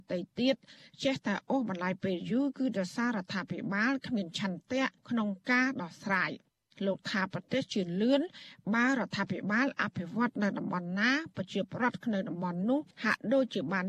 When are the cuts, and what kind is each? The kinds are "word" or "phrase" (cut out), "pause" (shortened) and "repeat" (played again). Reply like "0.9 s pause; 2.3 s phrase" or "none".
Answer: 5.0 s pause; 12.9 s pause